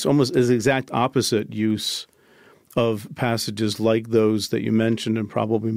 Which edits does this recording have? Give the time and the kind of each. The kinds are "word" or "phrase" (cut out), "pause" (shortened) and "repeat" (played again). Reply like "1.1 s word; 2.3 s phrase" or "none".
none